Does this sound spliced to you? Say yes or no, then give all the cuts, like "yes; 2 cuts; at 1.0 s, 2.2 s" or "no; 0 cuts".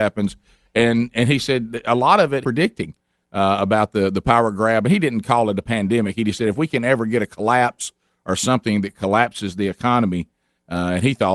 yes; 1 cut; at 2.4 s